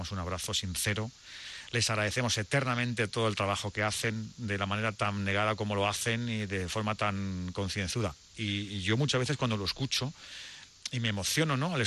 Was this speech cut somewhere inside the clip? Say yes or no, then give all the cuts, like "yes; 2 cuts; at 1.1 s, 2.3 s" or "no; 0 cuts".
no; 0 cuts